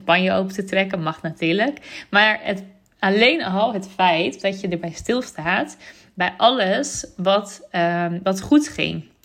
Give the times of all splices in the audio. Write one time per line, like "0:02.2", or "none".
none